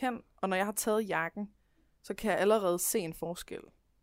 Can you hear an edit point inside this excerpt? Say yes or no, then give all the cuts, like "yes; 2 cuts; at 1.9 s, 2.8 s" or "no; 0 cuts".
no; 0 cuts